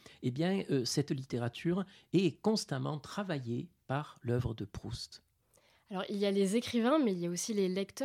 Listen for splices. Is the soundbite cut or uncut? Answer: uncut